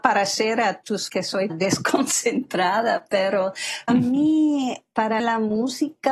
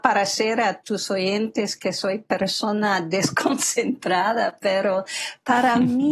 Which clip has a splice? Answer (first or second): first